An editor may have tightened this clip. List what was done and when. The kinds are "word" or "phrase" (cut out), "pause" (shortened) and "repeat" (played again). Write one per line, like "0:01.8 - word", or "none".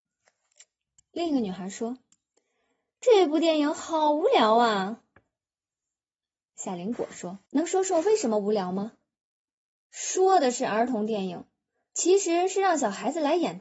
0:07.5 - pause
0:09.5 - pause